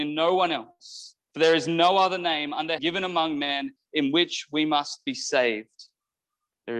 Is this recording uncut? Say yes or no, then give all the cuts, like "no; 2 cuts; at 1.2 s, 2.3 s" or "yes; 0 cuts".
no; 2 cuts; at 1.2 s, 2.8 s